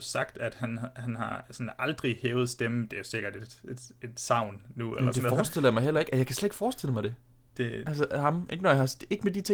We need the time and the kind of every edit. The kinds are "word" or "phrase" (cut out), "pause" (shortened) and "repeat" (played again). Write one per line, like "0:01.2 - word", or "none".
none